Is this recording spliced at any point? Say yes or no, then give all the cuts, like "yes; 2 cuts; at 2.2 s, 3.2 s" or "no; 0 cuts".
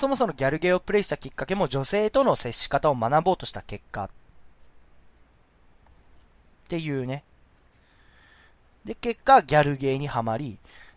no; 0 cuts